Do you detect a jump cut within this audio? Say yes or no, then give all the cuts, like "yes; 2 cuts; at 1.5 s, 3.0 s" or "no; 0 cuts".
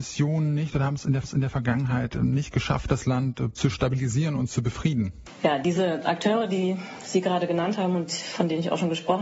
yes; 1 cut; at 1.2 s